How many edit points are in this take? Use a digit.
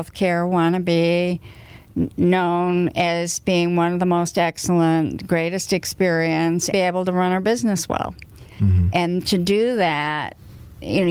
1